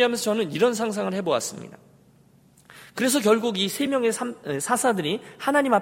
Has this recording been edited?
no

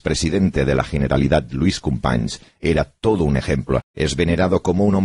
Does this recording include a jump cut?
yes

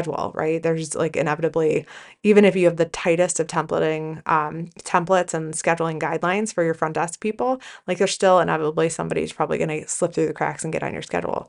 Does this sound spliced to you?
no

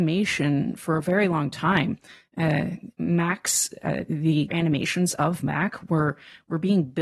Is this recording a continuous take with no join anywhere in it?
no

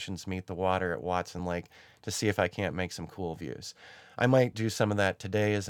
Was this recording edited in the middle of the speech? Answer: no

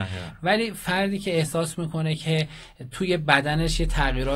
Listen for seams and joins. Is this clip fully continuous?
yes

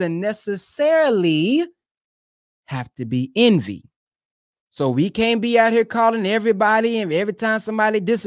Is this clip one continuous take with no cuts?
yes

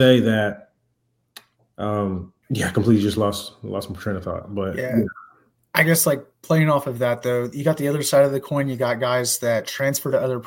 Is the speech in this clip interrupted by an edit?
yes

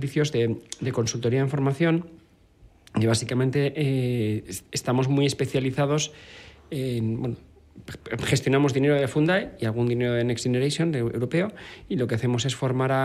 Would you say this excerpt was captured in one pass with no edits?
yes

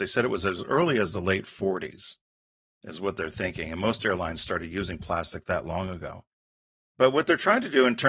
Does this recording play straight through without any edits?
yes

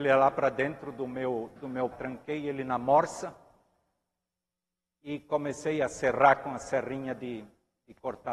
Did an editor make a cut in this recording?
yes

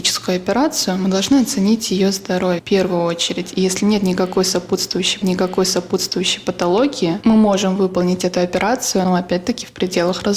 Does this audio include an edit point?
yes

